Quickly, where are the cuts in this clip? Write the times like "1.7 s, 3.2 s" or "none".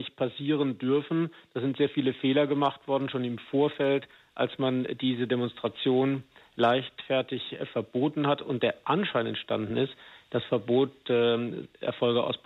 none